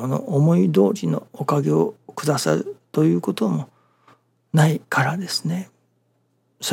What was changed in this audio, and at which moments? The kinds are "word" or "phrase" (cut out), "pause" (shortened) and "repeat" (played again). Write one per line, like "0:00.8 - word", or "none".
0:04.9 - pause